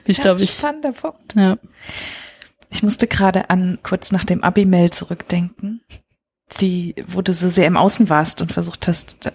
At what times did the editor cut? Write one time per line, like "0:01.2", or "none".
0:03.8